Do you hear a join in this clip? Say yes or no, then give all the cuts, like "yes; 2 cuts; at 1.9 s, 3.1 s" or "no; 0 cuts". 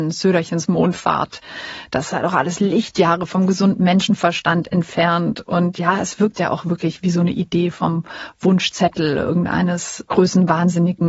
no; 0 cuts